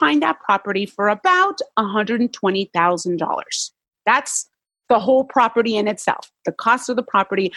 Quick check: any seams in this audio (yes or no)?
no